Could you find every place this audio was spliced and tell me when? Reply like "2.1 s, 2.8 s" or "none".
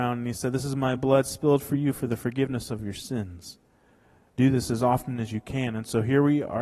none